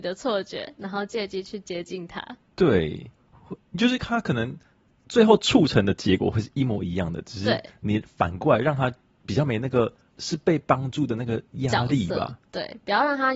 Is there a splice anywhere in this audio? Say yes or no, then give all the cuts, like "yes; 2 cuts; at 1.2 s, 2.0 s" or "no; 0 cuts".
yes; 2 cuts; at 2.4 s, 10.1 s